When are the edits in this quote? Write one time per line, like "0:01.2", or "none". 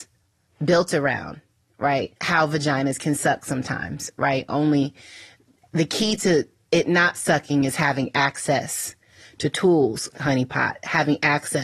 0:10.1